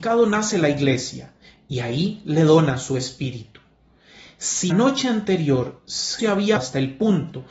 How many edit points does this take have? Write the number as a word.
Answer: three